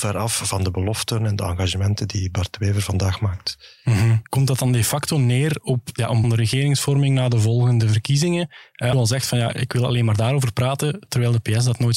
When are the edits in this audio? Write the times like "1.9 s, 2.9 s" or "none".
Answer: 4.3 s, 6.2 s, 8.9 s